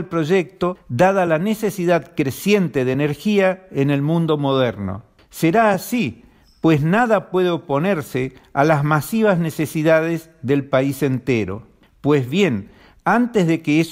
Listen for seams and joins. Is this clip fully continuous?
yes; 0 cuts

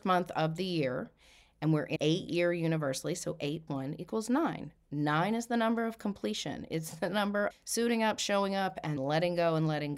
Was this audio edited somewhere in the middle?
yes; 4 cuts; at 2.0 s, 3.7 s, 7.5 s, 9.0 s

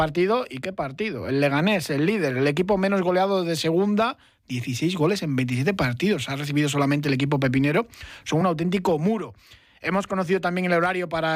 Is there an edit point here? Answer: no; 0 cuts

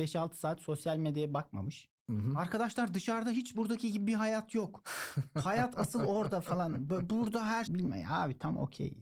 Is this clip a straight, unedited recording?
no; 2 cuts; at 3.5 s, 7.7 s

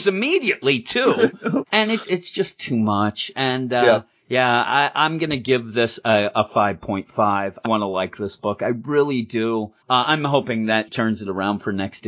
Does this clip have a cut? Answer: yes; 4 cuts; at 2.0 s, 7.6 s, 9.8 s, 10.9 s

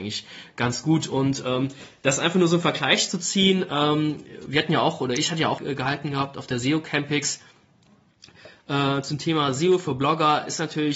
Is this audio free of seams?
no; 1 cut; at 5.6 s

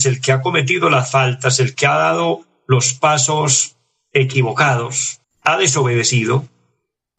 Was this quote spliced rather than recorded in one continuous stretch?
yes; 1 cut; at 5.2 s

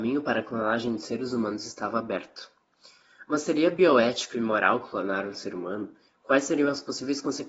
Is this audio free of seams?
yes; 0 cuts

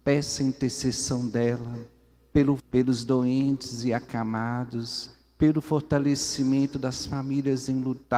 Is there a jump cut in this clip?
yes; 1 cut; at 2.6 s

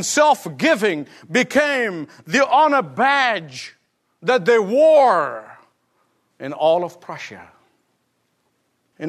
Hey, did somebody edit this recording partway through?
no; 0 cuts

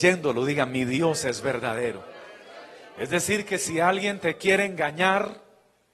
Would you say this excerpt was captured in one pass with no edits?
yes; 0 cuts

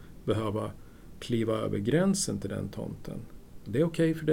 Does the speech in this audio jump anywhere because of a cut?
no; 0 cuts

